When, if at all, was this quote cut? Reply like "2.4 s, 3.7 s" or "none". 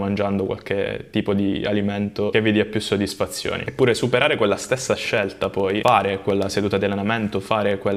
none